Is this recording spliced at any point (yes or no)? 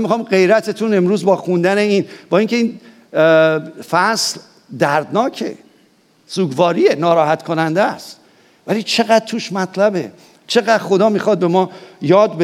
no